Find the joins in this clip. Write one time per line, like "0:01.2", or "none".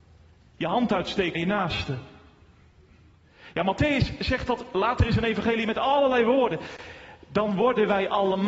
0:01.3